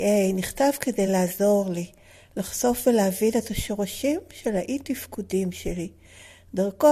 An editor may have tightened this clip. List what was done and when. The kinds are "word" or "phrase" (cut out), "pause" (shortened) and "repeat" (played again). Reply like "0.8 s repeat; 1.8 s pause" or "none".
none